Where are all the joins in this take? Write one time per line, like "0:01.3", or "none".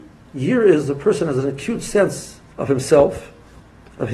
0:02.5